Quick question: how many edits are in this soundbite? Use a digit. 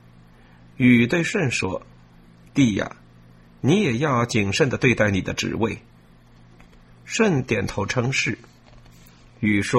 0